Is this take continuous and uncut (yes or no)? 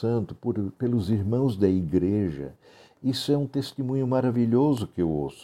yes